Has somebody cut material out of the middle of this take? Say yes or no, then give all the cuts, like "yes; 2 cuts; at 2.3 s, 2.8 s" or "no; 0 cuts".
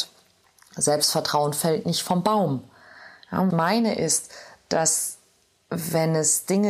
yes; 1 cut; at 3.5 s